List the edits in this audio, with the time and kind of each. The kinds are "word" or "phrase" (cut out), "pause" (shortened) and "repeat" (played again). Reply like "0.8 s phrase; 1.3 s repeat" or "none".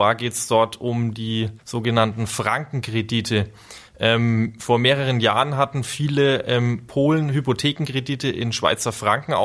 1.6 s pause